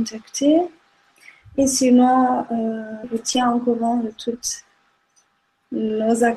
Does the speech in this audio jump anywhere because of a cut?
yes; 1 cut; at 3.0 s

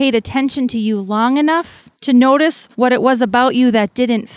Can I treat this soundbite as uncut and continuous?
no; 2 cuts; at 1.9 s, 2.7 s

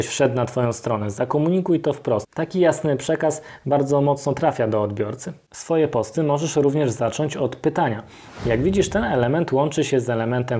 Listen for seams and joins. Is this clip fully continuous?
yes; 0 cuts

